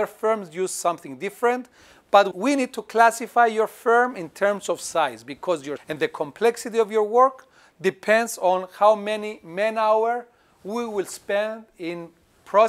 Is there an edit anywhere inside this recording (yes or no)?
yes